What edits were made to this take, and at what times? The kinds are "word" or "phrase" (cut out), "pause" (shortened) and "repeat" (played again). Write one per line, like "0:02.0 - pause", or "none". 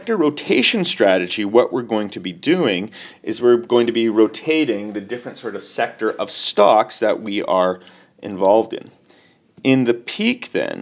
none